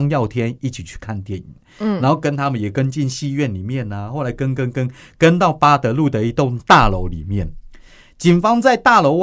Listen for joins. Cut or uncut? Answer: uncut